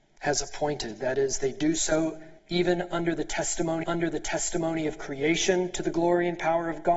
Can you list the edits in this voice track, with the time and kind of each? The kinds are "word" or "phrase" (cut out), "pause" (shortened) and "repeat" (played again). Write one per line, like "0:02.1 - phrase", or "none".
0:02.4 - pause
0:03.8 - repeat